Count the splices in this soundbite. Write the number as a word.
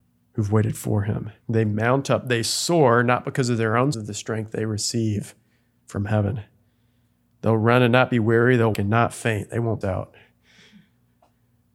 four